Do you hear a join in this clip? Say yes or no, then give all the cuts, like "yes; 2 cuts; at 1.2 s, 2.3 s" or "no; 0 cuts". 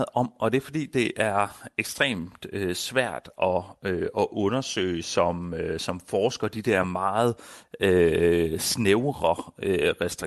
no; 0 cuts